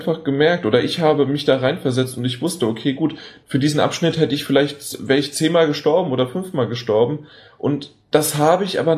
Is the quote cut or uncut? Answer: uncut